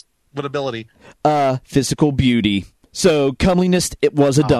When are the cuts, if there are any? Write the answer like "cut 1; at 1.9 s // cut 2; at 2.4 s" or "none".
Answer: none

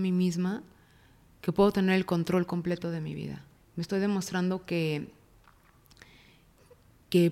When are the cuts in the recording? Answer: cut 1; at 3.6 s

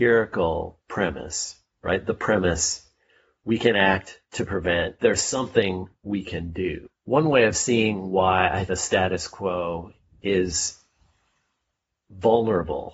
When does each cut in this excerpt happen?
cut 1; at 5.0 s // cut 2; at 8.7 s

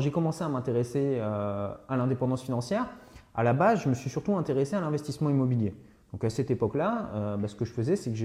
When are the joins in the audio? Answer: none

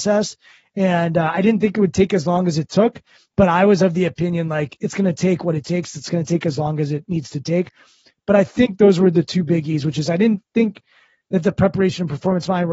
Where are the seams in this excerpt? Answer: none

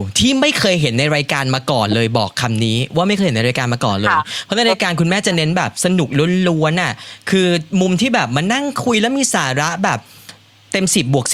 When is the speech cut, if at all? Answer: none

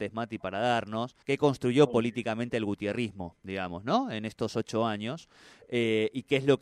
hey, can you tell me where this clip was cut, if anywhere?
cut 1; at 1.2 s

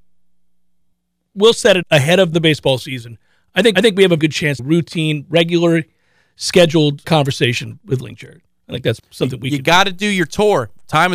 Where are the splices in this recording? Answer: cut 1; at 0.9 s // cut 2; at 1.8 s // cut 3; at 2.3 s // cut 4; at 3.7 s // cut 5; at 4.2 s // cut 6; at 4.6 s // cut 7; at 7.0 s // cut 8; at 9.0 s

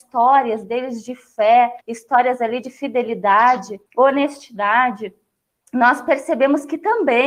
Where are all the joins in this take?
cut 1; at 1.8 s // cut 2; at 3.9 s

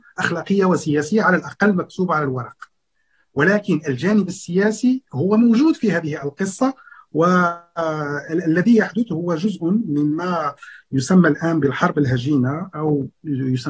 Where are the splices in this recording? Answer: none

